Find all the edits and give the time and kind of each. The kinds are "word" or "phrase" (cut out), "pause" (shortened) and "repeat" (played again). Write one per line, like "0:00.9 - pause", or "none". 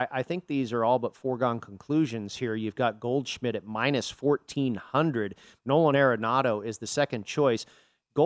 none